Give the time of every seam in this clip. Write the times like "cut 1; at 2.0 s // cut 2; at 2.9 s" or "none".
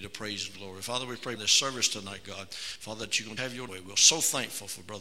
cut 1; at 1.4 s // cut 2; at 3.4 s // cut 3; at 3.7 s